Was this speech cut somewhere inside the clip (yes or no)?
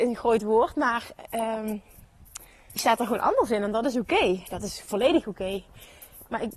yes